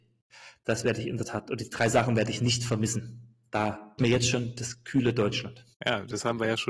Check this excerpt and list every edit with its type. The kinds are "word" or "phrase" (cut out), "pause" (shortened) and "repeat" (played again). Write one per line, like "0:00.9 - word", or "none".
0:04.0 - phrase
0:05.7 - pause